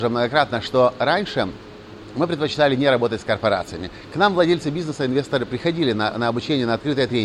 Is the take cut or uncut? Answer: uncut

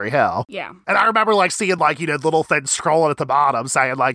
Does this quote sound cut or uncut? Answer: uncut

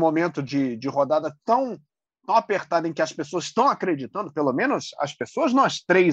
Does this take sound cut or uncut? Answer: uncut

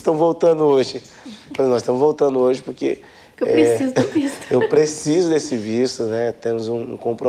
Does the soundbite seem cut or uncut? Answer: uncut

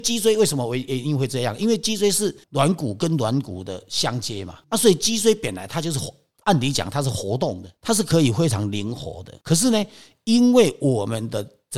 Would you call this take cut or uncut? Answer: cut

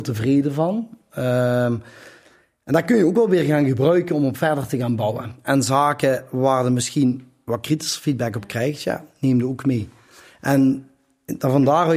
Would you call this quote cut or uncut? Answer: uncut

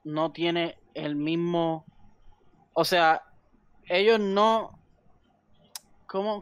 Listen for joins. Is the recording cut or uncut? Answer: uncut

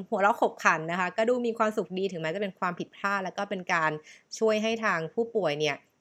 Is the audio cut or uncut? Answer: uncut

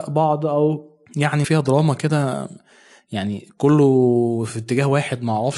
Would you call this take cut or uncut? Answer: cut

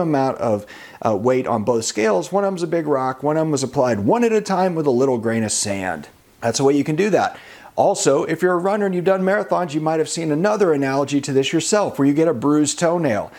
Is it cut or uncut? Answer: uncut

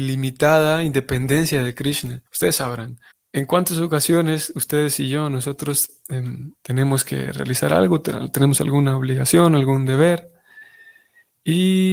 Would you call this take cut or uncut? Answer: cut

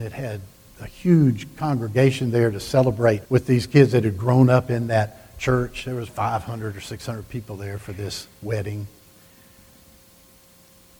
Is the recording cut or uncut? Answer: cut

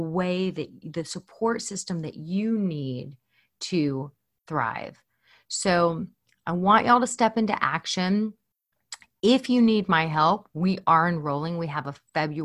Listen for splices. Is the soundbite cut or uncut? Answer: uncut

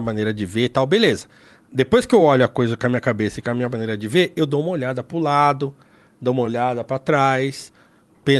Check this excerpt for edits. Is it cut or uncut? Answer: uncut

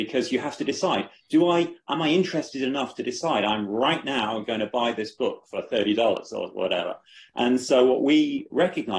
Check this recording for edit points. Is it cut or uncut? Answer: uncut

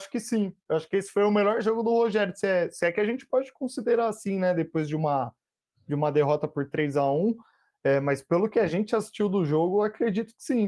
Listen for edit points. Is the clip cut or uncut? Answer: uncut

